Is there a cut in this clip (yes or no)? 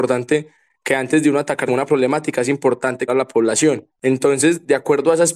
yes